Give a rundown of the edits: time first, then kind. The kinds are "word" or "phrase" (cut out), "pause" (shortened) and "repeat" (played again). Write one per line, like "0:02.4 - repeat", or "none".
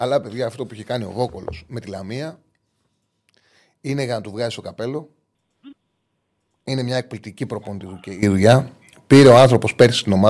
none